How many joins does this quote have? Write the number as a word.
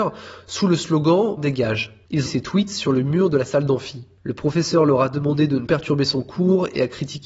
three